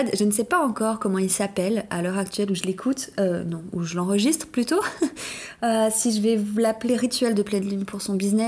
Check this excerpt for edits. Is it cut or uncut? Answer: uncut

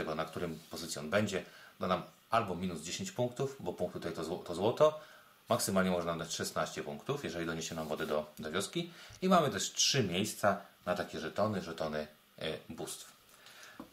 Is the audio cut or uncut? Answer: uncut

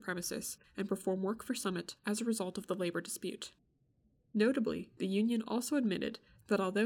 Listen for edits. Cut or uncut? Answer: uncut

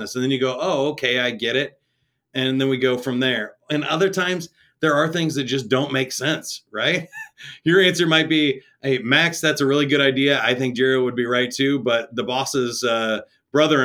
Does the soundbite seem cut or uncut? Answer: uncut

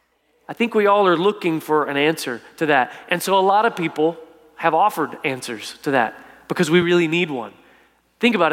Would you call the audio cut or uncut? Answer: uncut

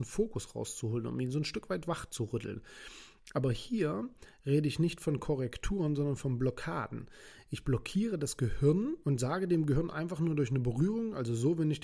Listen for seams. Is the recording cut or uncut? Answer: cut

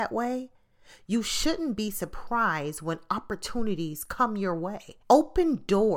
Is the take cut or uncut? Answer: cut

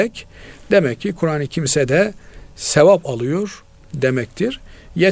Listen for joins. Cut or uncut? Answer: cut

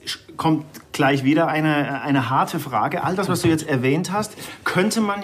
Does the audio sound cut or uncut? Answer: uncut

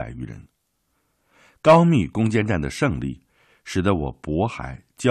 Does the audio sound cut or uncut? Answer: uncut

